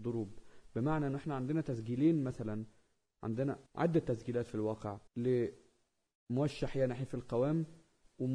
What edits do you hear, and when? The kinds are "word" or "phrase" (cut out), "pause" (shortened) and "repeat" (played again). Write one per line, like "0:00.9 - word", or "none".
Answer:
0:03.7 - pause
0:05.1 - pause